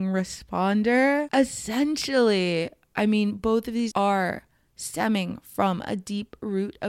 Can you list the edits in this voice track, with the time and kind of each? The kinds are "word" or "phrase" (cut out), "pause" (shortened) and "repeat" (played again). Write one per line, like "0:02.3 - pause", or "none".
0:03.9 - word